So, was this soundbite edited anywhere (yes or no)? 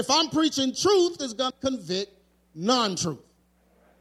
yes